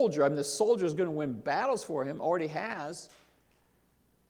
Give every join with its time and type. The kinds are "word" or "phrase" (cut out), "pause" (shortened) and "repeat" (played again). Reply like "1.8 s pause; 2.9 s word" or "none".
none